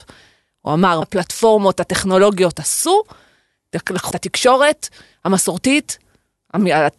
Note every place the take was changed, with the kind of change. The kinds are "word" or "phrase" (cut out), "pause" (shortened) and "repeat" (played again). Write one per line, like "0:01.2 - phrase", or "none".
0:01.0 - word
0:04.1 - word